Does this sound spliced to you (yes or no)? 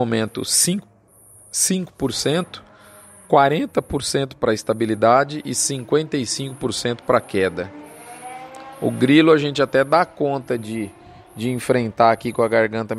no